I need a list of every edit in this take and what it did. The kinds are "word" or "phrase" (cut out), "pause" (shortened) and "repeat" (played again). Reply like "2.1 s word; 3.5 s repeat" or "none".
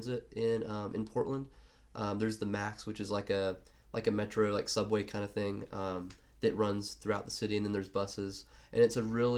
none